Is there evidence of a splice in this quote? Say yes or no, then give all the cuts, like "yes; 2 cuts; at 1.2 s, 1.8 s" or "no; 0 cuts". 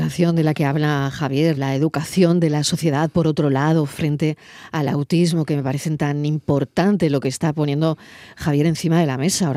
yes; 1 cut; at 1.6 s